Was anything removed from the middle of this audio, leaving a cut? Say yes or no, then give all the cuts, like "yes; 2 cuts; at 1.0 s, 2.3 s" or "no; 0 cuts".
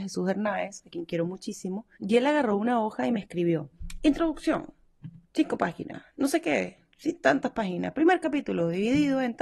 yes; 2 cuts; at 1.9 s, 5.2 s